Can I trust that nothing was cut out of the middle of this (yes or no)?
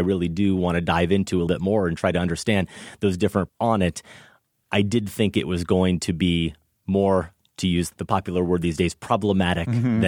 no